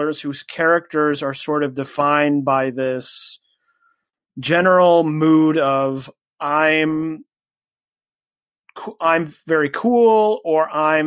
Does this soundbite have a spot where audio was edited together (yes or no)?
no